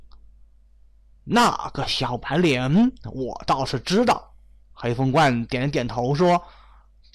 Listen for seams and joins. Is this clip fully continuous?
yes; 0 cuts

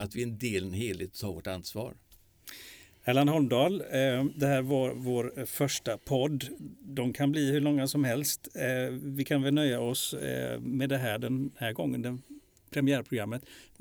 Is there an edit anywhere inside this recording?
no; 0 cuts

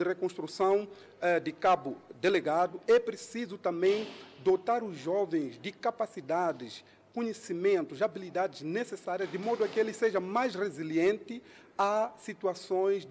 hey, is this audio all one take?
yes; 0 cuts

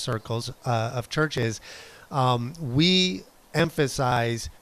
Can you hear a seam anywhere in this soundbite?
no; 0 cuts

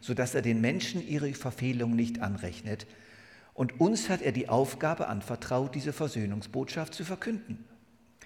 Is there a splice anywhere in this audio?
no; 0 cuts

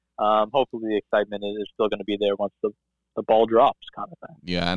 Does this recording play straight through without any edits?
yes; 0 cuts

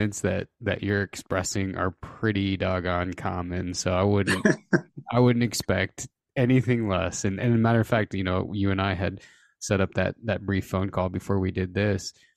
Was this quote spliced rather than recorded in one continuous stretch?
no; 0 cuts

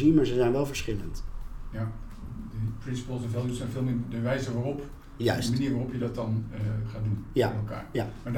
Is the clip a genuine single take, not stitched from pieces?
yes; 0 cuts

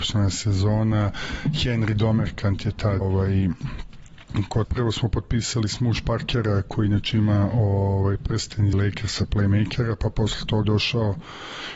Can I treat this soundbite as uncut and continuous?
no; 4 cuts; at 3.0 s, 4.6 s, 8.7 s, 10.6 s

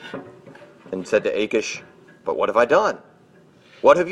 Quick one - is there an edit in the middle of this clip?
yes; 2 cuts; at 1.0 s, 2.1 s

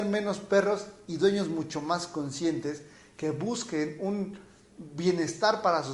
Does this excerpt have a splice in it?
no; 0 cuts

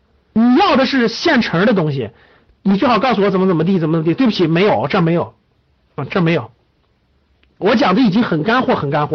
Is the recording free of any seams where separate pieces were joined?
yes; 0 cuts

